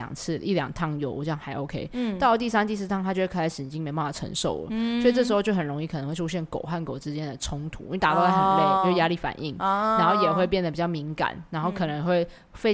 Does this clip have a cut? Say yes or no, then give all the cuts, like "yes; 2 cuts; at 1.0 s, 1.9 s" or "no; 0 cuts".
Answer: no; 0 cuts